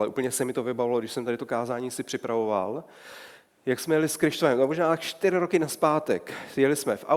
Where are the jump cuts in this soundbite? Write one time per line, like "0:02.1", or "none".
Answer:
none